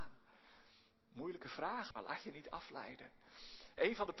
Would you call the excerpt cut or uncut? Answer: cut